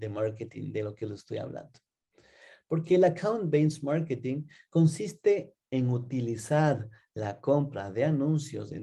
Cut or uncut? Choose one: uncut